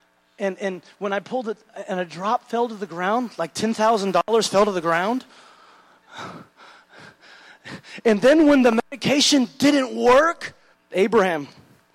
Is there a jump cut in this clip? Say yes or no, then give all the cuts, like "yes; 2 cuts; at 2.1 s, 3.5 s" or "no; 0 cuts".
yes; 1 cut; at 10.7 s